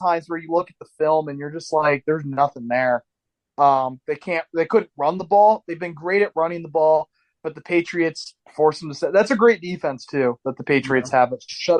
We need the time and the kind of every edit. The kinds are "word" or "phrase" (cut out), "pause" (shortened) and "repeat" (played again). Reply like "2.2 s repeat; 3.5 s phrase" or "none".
none